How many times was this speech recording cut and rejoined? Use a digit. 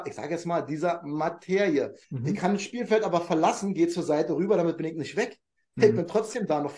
1